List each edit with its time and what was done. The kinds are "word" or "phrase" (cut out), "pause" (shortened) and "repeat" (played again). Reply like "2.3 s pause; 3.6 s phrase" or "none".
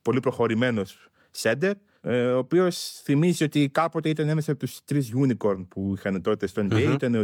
none